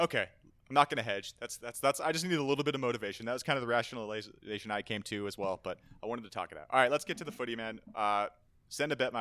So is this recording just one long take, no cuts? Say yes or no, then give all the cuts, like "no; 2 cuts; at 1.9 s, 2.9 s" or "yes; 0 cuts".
yes; 0 cuts